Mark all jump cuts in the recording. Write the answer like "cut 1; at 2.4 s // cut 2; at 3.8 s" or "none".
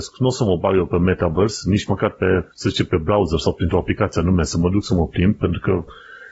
cut 1; at 2.5 s